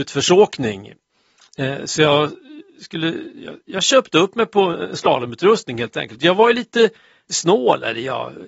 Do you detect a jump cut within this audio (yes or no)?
no